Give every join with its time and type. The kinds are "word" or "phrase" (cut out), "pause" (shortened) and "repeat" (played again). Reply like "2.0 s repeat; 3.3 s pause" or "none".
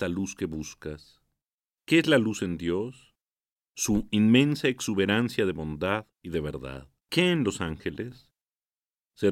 1.5 s pause; 3.5 s pause; 7.0 s pause